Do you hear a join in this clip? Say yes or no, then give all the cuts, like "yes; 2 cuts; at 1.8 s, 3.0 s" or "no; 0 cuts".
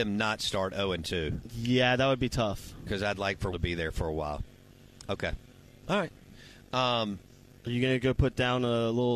yes; 2 cuts; at 3.5 s, 5.6 s